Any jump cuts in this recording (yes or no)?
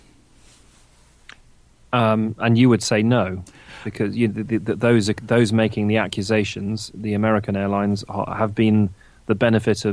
no